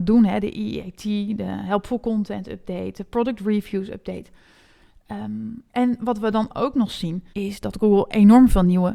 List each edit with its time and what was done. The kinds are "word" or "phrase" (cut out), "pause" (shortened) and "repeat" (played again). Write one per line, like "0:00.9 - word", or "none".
0:07.3 - pause